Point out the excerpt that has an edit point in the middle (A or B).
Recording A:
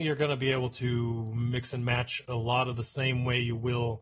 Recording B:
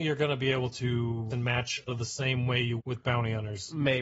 B